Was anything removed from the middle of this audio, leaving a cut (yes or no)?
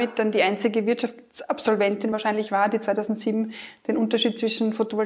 no